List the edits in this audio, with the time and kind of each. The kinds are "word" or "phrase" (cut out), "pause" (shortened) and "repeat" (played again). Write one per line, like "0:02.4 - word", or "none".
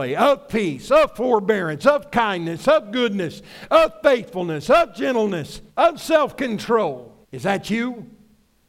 0:05.7 - pause
0:07.2 - pause

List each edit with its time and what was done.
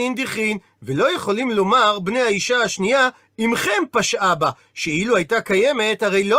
none

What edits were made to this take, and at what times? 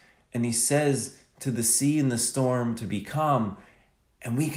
none

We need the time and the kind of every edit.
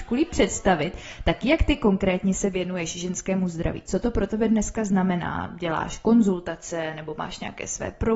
none

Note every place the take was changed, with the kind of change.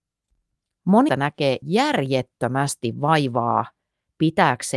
0:01.1 - word
0:01.6 - word

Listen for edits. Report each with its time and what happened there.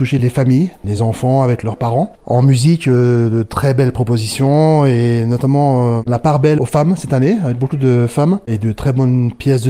none

